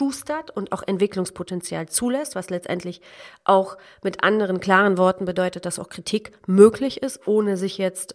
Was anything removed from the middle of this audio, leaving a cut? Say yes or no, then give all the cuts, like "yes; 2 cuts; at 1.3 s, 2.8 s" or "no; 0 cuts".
no; 0 cuts